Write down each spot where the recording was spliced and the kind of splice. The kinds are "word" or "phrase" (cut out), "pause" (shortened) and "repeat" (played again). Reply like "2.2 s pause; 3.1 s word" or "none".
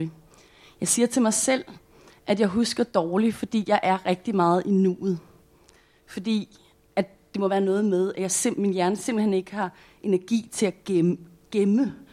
none